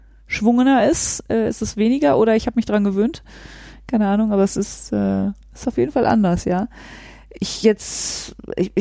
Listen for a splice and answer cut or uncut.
uncut